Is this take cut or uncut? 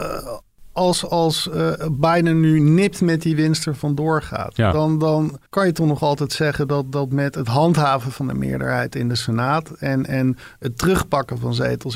cut